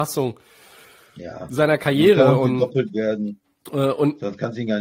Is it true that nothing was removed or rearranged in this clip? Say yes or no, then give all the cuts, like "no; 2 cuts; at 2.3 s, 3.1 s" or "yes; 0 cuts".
yes; 0 cuts